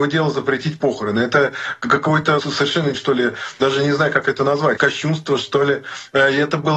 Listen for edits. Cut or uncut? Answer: cut